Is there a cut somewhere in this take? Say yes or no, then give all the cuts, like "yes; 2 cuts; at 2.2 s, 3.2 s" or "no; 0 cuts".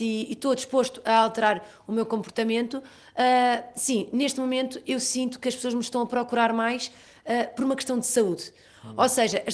no; 0 cuts